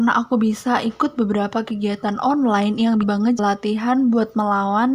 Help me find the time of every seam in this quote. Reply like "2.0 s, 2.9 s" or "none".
3.0 s, 3.4 s